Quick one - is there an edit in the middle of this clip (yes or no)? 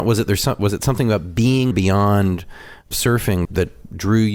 yes